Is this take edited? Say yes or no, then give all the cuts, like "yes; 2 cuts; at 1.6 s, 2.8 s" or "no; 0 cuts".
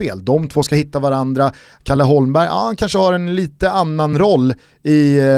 no; 0 cuts